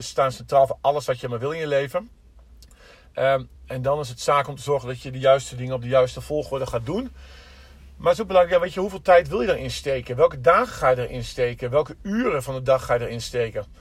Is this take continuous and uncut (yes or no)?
no